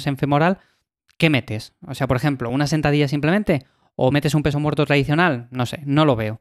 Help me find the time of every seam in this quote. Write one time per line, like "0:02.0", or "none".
none